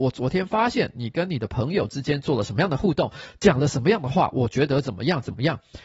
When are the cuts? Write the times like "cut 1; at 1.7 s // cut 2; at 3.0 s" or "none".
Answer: none